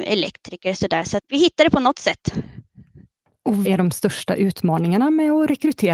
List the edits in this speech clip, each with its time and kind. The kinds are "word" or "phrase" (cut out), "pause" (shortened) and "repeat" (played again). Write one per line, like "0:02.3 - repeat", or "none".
0:01.2 - word
0:03.6 - word